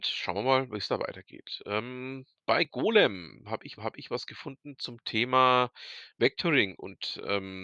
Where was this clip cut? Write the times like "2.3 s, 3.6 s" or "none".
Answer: 3.8 s